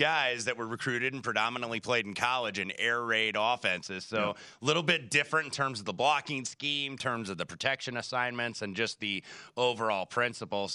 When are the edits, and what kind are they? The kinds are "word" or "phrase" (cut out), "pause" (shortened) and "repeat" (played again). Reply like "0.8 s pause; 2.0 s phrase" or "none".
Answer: none